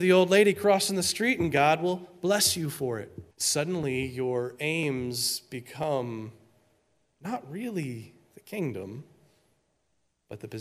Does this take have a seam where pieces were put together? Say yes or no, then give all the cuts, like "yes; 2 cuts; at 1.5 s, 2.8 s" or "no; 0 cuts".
yes; 1 cut; at 3.3 s